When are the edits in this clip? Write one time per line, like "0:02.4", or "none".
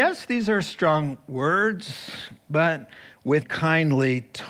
0:03.4